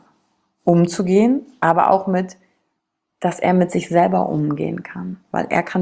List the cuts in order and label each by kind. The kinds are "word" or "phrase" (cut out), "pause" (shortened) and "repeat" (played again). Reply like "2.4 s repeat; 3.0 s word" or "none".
none